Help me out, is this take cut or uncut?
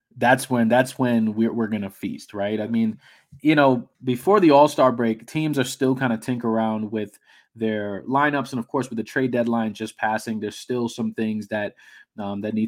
cut